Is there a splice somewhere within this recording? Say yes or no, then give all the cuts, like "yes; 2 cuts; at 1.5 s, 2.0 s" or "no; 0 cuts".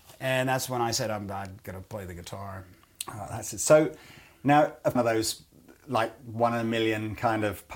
yes; 1 cut; at 5.0 s